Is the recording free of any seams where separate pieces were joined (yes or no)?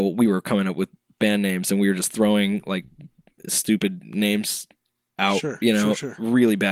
yes